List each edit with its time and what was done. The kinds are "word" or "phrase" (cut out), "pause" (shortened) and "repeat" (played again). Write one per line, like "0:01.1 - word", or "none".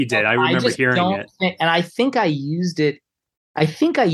none